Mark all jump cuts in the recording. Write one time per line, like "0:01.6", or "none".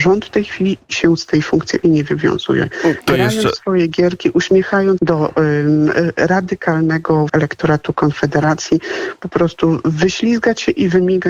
0:01.8
0:05.0
0:07.3
0:09.2